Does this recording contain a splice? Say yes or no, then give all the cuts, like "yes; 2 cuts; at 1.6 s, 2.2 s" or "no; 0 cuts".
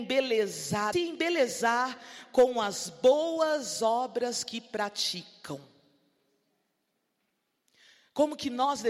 yes; 1 cut; at 0.9 s